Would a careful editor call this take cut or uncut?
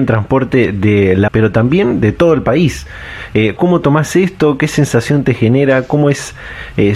cut